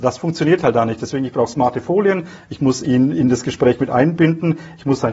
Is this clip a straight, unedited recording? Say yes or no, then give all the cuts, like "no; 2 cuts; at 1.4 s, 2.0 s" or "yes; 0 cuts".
yes; 0 cuts